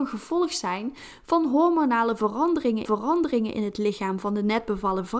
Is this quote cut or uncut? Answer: cut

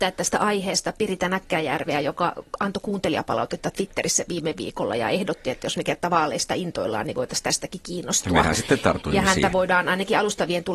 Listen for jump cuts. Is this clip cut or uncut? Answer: uncut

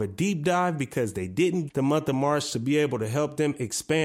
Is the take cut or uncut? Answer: cut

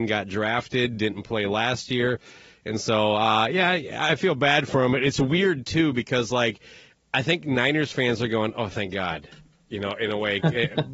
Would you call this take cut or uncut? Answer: uncut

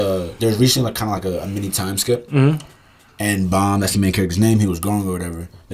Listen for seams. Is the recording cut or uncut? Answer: uncut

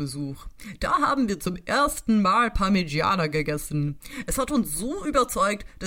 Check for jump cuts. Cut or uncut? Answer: uncut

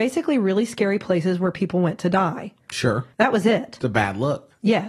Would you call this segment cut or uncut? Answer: cut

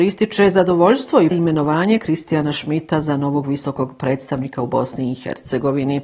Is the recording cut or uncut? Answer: cut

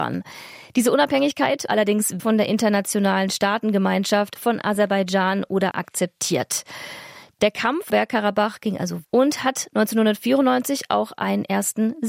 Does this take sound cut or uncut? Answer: cut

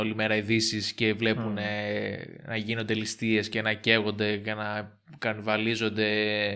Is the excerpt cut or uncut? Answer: uncut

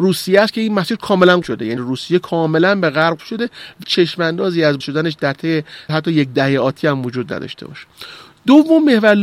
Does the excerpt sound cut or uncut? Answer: cut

